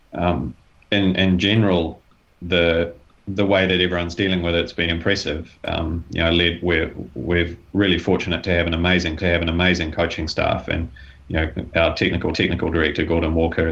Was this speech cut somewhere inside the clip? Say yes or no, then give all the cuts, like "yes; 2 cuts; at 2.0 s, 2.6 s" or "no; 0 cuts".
yes; 6 cuts; at 3.1 s, 4.9 s, 7.7 s, 9.2 s, 11.7 s, 12.3 s